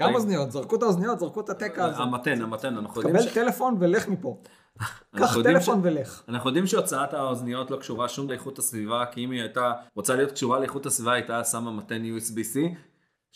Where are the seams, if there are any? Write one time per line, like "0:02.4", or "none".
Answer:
0:08.3
0:09.9